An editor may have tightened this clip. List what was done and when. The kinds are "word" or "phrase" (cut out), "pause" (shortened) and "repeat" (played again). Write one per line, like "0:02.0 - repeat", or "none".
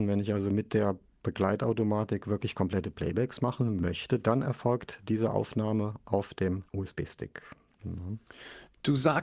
0:06.7 - pause